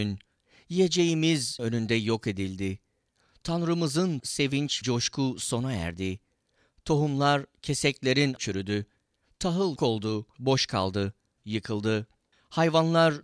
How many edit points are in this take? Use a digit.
7